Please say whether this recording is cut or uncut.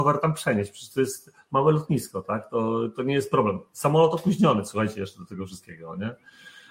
uncut